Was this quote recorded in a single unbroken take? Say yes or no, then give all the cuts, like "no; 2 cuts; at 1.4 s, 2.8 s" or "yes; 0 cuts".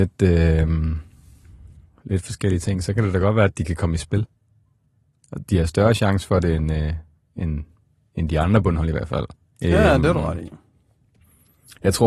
yes; 0 cuts